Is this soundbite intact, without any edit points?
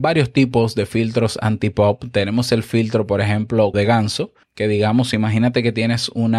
no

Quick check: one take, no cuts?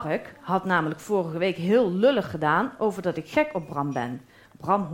yes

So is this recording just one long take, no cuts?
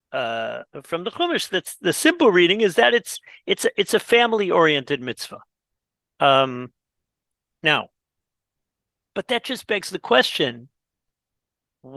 yes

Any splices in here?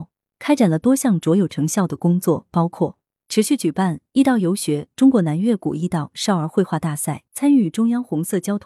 yes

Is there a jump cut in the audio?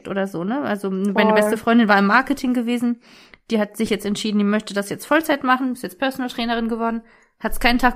no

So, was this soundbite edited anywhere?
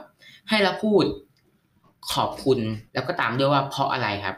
yes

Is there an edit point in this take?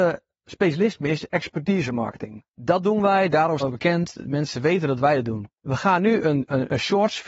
yes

